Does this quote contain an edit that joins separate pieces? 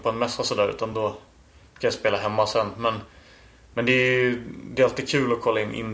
no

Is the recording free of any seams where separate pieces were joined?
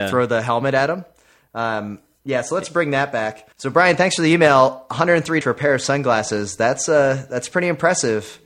no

